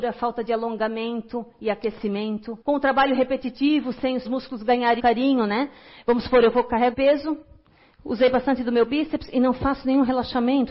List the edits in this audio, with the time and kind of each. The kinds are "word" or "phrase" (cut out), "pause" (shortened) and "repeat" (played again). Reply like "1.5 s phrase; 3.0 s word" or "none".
2.6 s pause; 4.2 s word; 5.0 s word; 6.9 s word